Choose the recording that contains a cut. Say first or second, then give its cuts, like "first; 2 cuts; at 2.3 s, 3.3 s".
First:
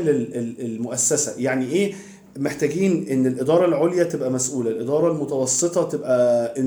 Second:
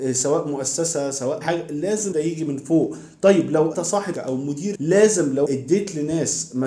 second; 6 cuts; at 1.4 s, 2.1 s, 3.7 s, 4.1 s, 4.7 s, 5.5 s